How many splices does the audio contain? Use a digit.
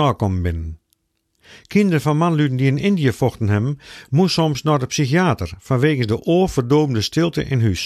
0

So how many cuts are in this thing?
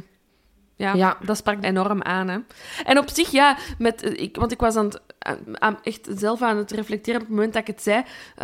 2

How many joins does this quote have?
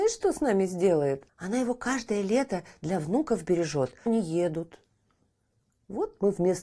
2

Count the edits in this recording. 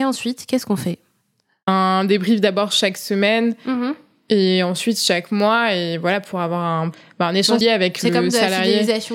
1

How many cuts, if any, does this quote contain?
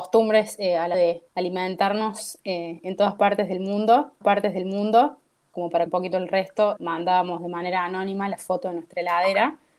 5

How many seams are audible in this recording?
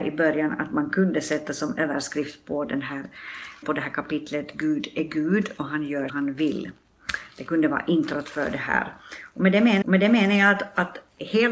3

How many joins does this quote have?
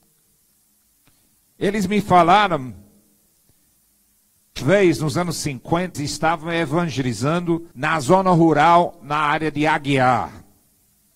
3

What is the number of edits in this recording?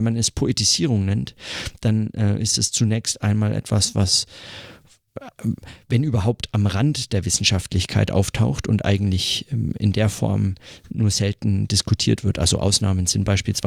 0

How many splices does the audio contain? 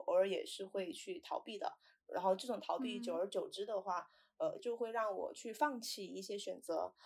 0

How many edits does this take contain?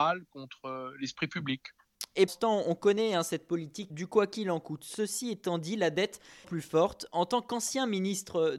3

